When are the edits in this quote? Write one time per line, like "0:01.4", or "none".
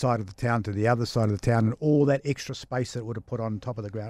none